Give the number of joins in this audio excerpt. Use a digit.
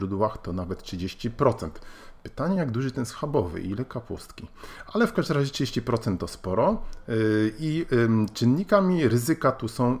0